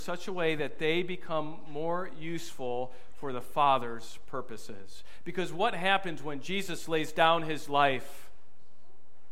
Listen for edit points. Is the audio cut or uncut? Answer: uncut